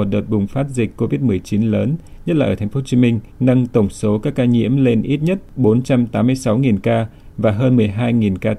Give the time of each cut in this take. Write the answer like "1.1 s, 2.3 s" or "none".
3.3 s